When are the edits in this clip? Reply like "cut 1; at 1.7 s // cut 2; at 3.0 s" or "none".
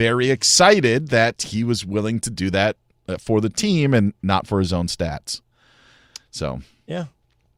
none